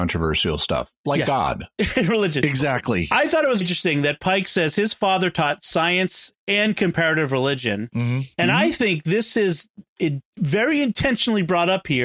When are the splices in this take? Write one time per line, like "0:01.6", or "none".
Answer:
0:03.6
0:08.3